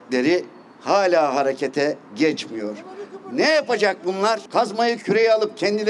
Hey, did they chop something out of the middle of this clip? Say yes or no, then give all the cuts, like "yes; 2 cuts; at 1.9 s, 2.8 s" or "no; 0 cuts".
yes; 1 cut; at 2.0 s